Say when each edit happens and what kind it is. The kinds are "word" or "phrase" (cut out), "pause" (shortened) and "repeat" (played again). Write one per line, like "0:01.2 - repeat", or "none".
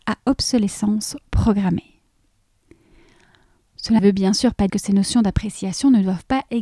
0:04.0 - word
0:04.7 - word